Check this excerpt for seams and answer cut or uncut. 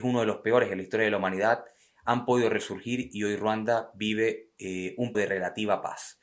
cut